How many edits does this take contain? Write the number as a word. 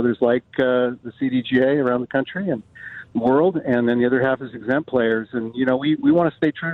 zero